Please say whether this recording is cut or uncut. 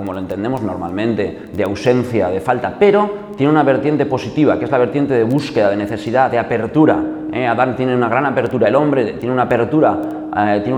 uncut